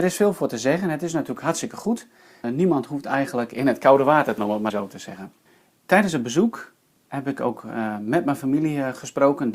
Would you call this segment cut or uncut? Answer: cut